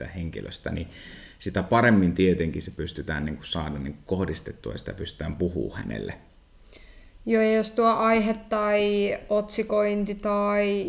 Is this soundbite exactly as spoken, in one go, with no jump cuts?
yes; 0 cuts

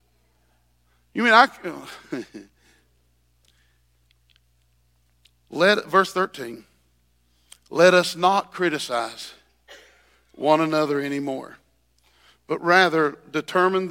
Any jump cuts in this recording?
no; 0 cuts

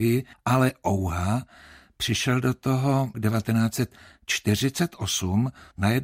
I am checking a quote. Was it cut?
yes; 1 cut; at 3.1 s

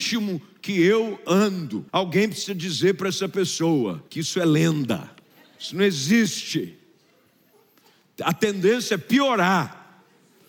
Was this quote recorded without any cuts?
no; 3 cuts; at 1.9 s, 4.1 s, 5.3 s

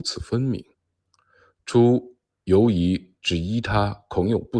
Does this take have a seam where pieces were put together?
no; 0 cuts

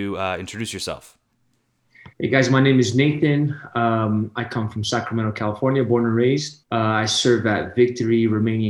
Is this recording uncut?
no; 2 cuts; at 2.1 s, 6.6 s

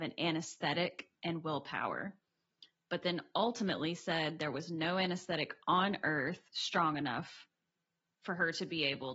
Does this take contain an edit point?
no; 0 cuts

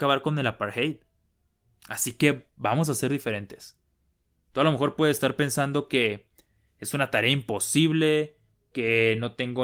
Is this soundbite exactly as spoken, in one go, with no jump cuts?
yes; 0 cuts

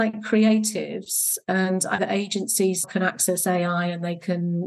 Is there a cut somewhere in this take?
yes; 2 cuts; at 2.0 s, 2.8 s

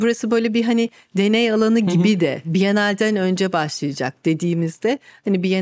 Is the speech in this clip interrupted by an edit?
no; 0 cuts

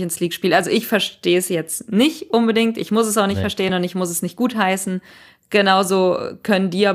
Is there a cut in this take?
no; 0 cuts

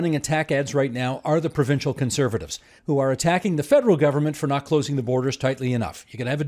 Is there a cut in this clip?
yes; 1 cut; at 2.8 s

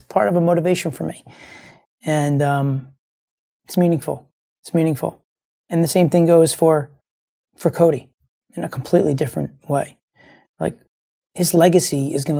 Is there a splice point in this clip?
no; 0 cuts

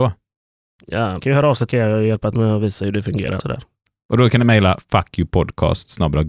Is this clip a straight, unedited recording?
no; 4 cuts; at 1.2 s, 1.7 s, 2.3 s, 3.4 s

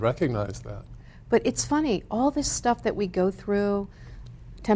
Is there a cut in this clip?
no; 0 cuts

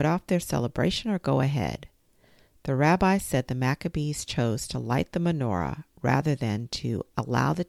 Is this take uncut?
yes; 0 cuts

